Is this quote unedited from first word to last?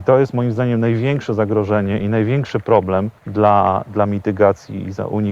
no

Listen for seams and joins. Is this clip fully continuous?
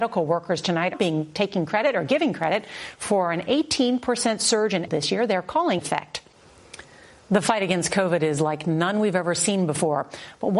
no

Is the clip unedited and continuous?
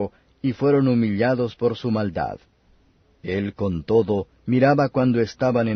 yes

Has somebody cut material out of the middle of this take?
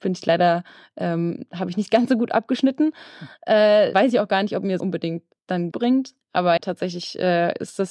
yes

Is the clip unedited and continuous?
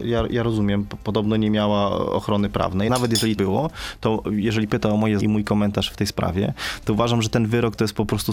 no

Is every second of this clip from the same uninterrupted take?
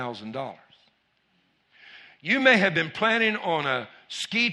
yes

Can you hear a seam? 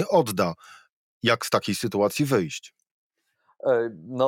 no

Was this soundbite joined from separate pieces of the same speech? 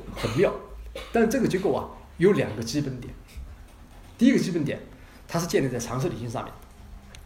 yes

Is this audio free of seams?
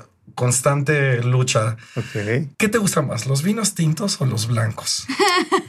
no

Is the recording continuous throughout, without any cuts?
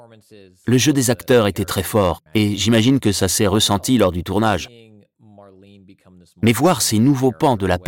no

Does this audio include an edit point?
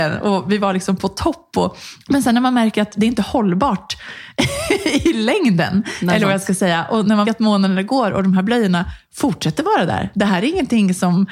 yes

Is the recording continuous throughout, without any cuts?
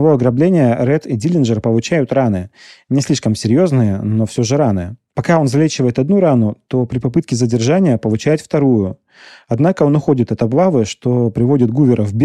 yes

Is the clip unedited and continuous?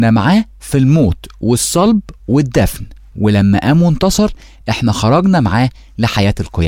yes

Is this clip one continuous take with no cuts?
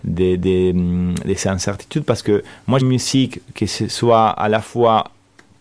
no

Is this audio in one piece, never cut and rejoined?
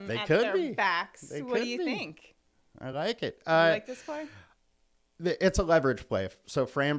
yes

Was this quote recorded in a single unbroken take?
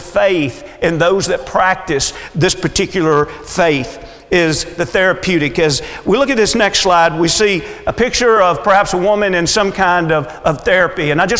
yes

